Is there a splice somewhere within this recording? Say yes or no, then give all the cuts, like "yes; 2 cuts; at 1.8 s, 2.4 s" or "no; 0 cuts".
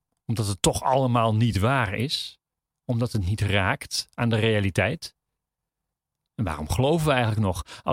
no; 0 cuts